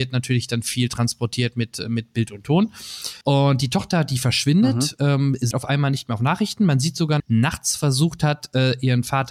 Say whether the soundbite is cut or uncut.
cut